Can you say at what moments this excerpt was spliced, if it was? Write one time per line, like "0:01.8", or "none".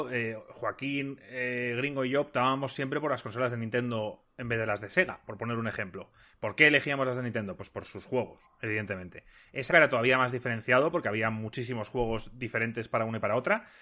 0:09.7

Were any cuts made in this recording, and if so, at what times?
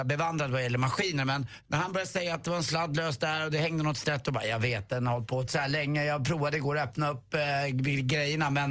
0:05.5

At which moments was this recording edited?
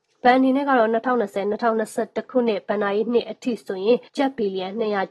0:04.1

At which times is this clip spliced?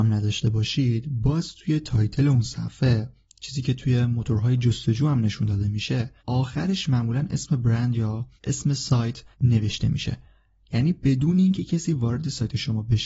0:06.2
0:08.4
0:09.3

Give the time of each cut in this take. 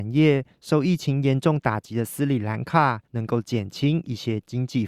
0:03.0

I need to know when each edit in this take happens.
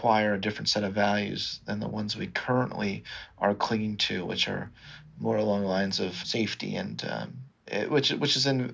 0:06.2

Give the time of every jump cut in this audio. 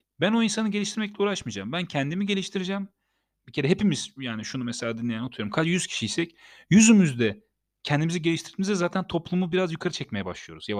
none

